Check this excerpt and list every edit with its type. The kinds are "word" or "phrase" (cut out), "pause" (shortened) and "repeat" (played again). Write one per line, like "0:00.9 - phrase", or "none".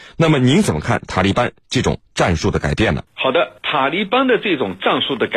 0:03.1 - pause
0:03.6 - pause